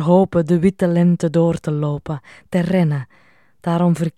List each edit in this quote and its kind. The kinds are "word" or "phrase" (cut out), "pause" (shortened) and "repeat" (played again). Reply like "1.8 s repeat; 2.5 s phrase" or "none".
none